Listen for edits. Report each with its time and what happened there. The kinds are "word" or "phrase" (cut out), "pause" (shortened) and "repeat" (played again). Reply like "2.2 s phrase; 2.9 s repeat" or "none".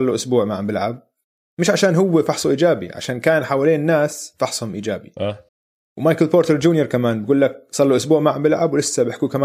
5.5 s pause